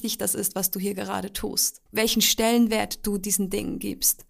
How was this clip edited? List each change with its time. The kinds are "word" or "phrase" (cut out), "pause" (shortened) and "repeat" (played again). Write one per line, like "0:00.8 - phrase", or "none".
0:01.9 - pause

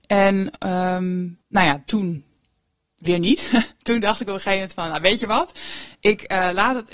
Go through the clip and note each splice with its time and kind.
0:01.4 - pause
0:01.9 - word

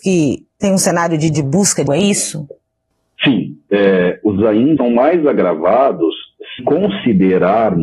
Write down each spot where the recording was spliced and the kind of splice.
0:01.3 - word
0:01.9 - word
0:04.4 - word
0:04.8 - word
0:06.6 - word

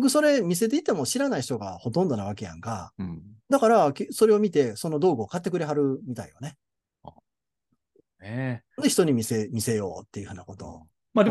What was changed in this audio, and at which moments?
none

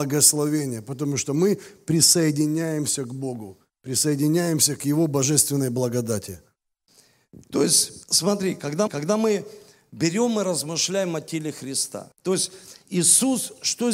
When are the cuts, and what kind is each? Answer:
0:08.0 - pause
0:08.9 - repeat
0:12.1 - pause

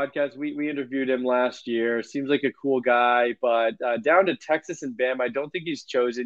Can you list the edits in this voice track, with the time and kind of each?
none

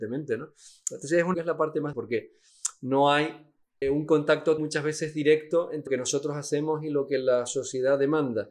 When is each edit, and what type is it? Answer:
0:01.3 - phrase
0:01.9 - word
0:03.8 - word
0:04.6 - word
0:05.9 - word

